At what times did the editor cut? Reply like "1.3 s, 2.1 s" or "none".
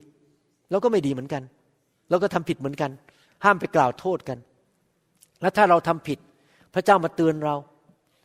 none